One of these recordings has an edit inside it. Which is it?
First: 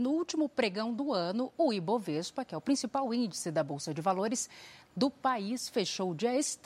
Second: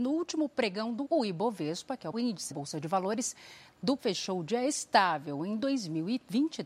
second; 4 cuts; at 1.0 s, 2.1 s, 2.5 s, 4.0 s

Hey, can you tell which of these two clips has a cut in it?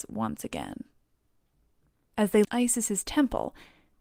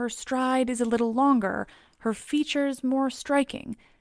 first; 1 cut; at 2.4 s

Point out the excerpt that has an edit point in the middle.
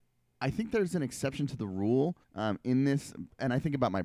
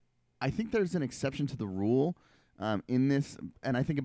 first; 1 cut; at 2.2 s

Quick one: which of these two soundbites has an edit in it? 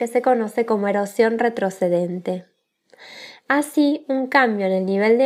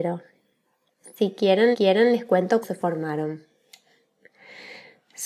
second; 2 cuts; at 1.7 s, 2.6 s

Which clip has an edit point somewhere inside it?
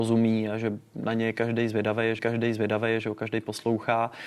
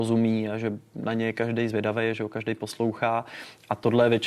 first; 1 cut; at 2.2 s

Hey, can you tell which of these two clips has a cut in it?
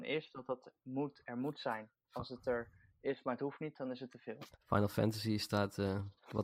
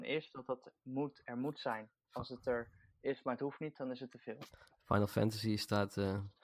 first; 1 cut; at 4.5 s

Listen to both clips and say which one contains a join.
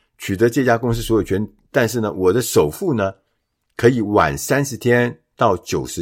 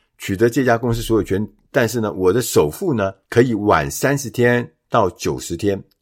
second; 1 cut; at 3.2 s

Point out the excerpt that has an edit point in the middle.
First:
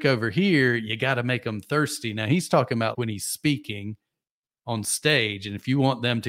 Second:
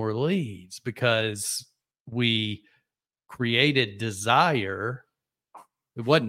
first; 1 cut; at 2.9 s

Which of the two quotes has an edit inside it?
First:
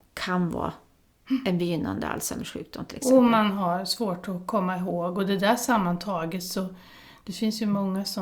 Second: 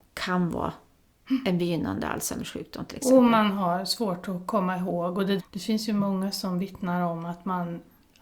second; 1 cut; at 5.4 s

